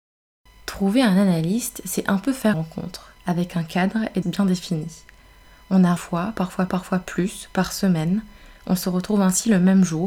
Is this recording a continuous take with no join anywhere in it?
no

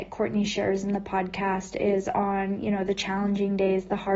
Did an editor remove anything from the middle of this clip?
no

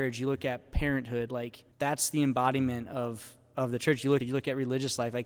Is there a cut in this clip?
yes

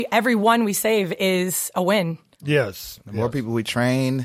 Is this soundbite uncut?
yes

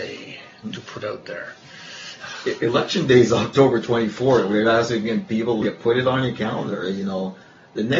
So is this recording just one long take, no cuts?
no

